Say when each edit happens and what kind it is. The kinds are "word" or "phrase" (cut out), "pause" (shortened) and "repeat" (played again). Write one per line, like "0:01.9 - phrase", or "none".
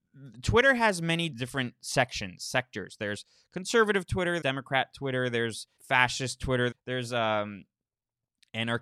0:01.3 - word
0:04.4 - word
0:05.8 - pause
0:06.7 - word

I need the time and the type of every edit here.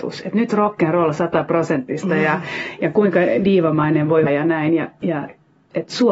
0:04.3 - word

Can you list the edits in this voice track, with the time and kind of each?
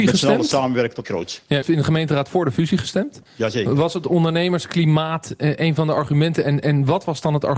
0:01.0 - word
0:01.6 - word
0:03.3 - pause

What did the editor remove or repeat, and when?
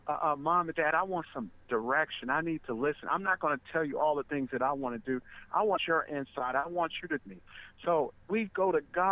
0:05.8 - phrase
0:07.2 - word
0:08.2 - word

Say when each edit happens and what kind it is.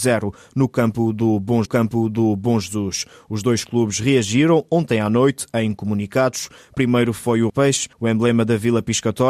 0:01.7 - repeat
0:07.5 - phrase
0:07.9 - pause

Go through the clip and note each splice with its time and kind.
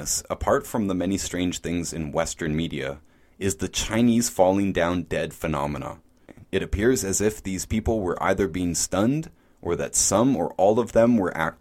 none

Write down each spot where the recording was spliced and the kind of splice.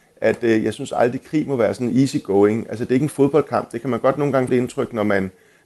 0:04.5 - word

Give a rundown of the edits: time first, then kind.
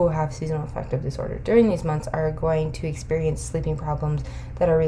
none

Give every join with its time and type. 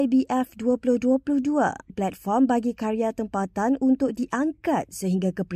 0:01.9 - word

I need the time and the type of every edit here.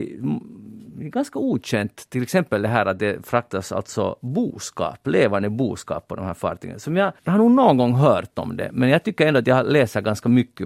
0:07.2 - pause

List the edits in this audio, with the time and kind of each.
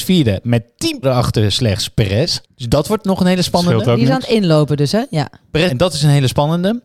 0:01.0 - word
0:02.4 - pause
0:05.7 - phrase

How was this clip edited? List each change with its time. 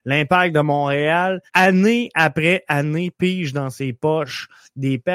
0:01.5 - pause

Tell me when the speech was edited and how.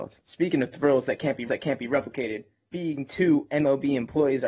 0:01.5 - repeat

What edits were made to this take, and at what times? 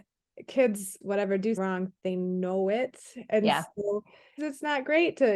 0:01.0 - word
0:01.6 - word
0:02.0 - pause
0:04.4 - phrase

